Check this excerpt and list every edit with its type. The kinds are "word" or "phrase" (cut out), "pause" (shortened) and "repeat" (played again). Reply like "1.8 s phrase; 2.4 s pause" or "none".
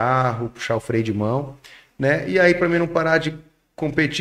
none

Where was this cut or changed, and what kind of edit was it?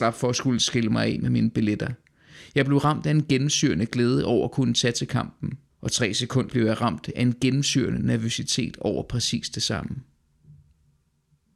5.7 s pause; 6.5 s word

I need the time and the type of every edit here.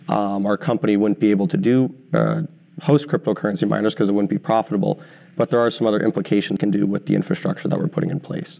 6.6 s word

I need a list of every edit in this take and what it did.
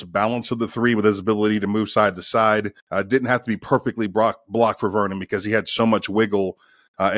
2.8 s pause

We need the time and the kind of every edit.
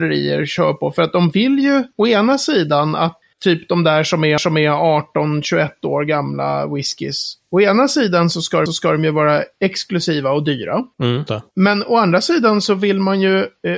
3.2 s word; 4.4 s repeat; 8.7 s repeat; 11.3 s word

